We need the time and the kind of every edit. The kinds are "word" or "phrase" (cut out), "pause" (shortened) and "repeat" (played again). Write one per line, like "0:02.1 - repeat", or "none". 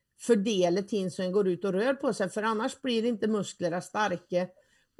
none